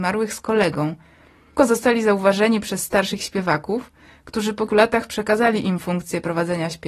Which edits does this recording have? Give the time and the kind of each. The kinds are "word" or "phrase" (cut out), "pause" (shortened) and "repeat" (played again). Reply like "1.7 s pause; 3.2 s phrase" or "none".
1.6 s word; 4.7 s word